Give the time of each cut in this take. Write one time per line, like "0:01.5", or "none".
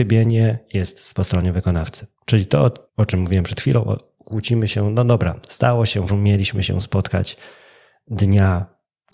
0:01.2
0:02.2
0:02.9
0:06.1